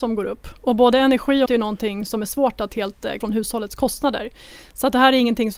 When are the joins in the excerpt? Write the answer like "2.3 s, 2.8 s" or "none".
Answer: 1.5 s, 3.2 s